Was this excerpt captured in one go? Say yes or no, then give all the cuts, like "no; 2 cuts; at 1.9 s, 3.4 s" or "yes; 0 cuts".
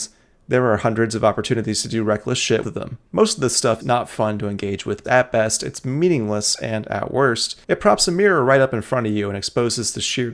no; 5 cuts; at 2.6 s, 3.1 s, 3.8 s, 5.0 s, 7.6 s